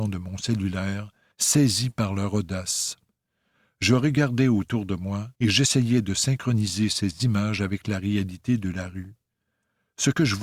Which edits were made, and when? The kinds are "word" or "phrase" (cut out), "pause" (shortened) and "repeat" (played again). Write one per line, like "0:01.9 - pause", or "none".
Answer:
0:01.3 - pause
0:05.3 - pause